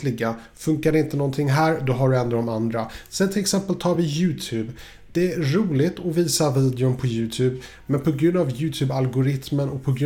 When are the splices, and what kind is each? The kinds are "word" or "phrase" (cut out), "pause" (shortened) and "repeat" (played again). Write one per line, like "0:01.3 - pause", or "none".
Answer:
none